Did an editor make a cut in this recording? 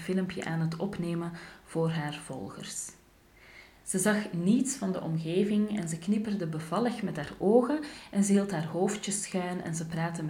no; 0 cuts

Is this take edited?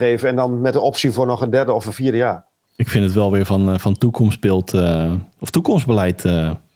no; 0 cuts

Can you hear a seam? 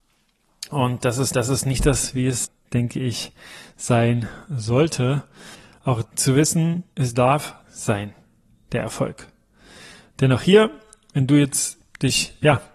yes; 4 cuts; at 1.3 s, 6.0 s, 6.9 s, 7.6 s

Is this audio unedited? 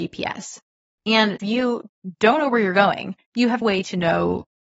no; 3 cuts; at 1.4 s, 3.2 s, 3.6 s

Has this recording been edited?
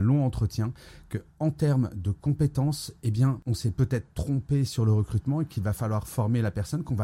no; 0 cuts

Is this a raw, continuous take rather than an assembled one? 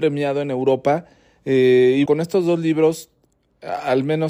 no; 1 cut; at 2.1 s

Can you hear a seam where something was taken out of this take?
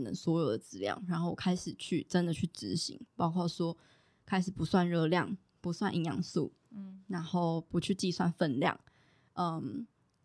no; 0 cuts

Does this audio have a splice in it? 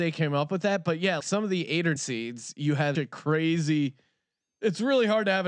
yes; 3 cuts; at 1.2 s, 2.0 s, 2.9 s

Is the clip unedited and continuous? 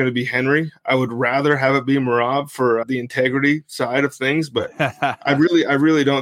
no; 1 cut; at 2.8 s

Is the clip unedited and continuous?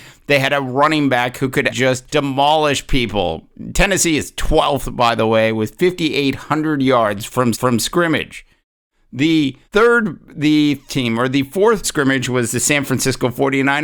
no; 6 cuts; at 1.7 s, 2.1 s, 7.5 s, 9.6 s, 10.9 s, 11.8 s

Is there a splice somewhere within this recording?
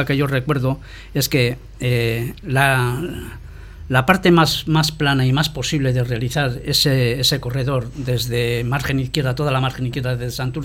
no; 0 cuts

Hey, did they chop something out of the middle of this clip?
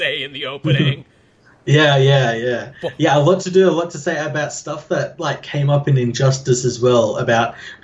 no; 0 cuts

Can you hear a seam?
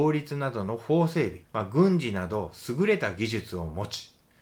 yes; 1 cut; at 1.4 s

